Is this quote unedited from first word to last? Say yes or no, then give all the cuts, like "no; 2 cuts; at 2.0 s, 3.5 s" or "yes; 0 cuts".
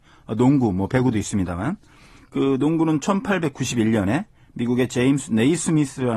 yes; 0 cuts